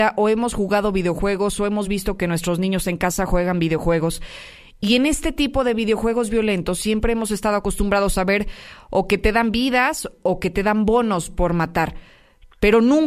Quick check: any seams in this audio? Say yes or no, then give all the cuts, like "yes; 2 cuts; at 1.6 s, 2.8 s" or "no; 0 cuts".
no; 0 cuts